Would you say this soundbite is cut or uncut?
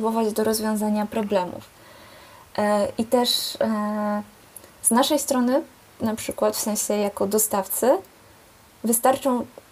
uncut